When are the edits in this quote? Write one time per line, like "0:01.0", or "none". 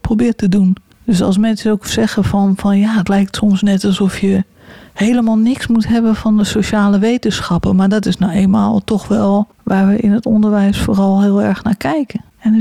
none